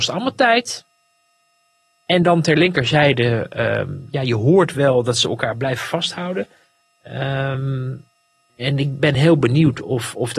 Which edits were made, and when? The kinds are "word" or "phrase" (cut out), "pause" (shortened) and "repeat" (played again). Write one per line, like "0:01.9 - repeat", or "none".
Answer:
none